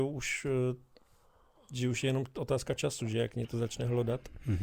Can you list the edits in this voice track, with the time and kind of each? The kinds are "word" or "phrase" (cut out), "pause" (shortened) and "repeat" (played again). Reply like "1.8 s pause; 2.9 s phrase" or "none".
none